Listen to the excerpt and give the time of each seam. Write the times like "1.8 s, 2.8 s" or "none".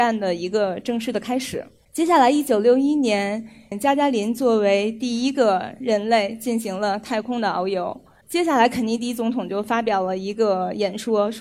3.7 s